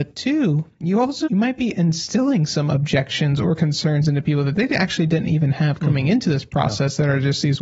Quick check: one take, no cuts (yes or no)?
yes